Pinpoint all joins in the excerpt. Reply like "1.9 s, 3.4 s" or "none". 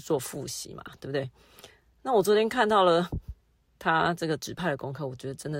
none